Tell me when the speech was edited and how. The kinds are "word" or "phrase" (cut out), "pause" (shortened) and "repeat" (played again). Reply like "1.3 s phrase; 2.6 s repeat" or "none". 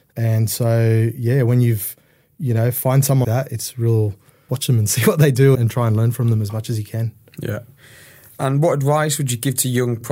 3.2 s word; 4.5 s word; 5.5 s word